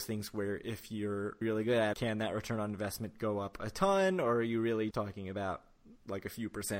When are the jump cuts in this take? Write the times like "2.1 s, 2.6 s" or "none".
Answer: 1.4 s, 1.9 s, 4.9 s